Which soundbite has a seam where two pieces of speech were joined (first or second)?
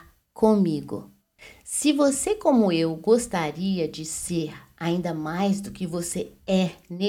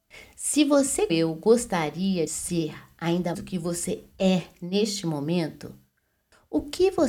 second